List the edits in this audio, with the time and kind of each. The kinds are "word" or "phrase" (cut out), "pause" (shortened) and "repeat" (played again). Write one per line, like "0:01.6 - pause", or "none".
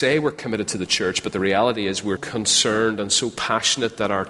0:02.2 - word